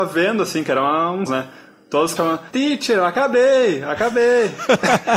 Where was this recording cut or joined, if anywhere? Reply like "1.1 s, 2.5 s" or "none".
1.3 s, 2.2 s, 2.5 s